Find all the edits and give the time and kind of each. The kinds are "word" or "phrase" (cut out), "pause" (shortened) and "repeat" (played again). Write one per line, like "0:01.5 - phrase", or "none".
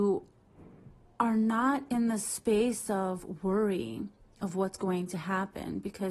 none